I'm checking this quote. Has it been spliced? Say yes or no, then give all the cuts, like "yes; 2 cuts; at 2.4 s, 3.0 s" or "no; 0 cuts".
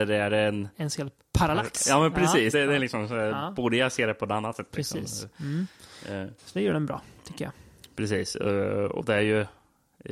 yes; 2 cuts; at 2.5 s, 6.4 s